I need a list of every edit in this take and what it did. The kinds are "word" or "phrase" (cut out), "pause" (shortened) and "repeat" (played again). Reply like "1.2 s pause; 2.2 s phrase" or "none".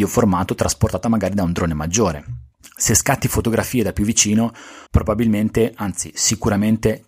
2.5 s pause; 4.9 s pause